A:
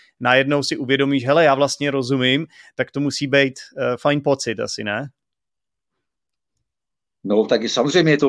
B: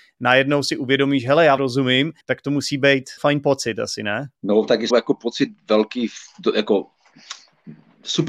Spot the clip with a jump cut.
B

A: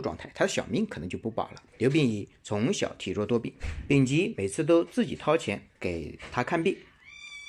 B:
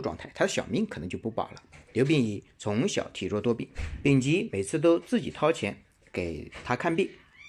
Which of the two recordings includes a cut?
A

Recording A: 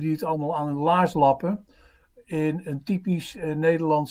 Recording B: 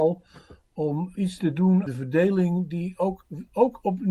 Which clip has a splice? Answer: B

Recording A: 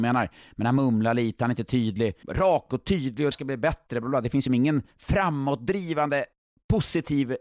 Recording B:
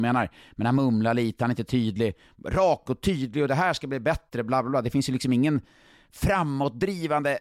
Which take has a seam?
A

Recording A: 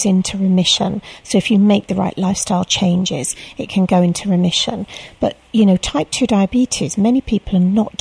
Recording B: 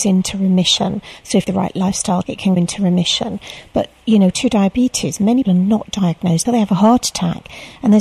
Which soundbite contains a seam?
B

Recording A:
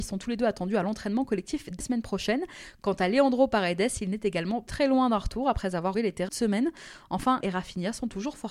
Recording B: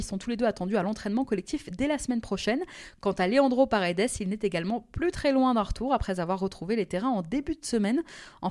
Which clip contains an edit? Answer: A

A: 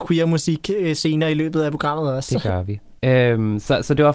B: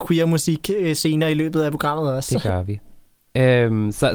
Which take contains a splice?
A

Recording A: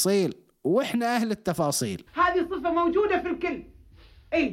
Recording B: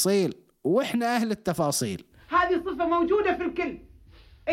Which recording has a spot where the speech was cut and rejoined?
A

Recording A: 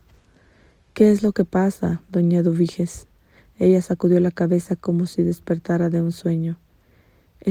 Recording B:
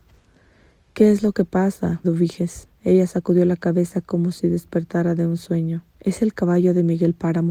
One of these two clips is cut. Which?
B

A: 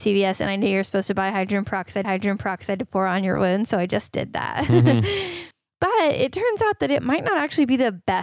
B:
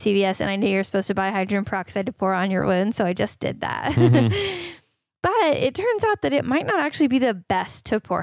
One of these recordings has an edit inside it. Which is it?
A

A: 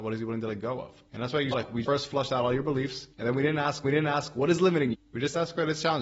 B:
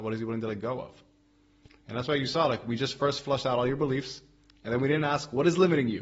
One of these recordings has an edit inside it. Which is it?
A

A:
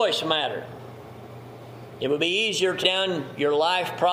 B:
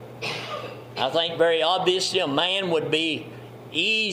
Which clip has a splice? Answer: A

